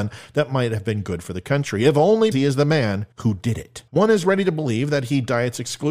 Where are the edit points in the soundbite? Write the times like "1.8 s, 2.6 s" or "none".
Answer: 2.3 s, 3.1 s, 3.9 s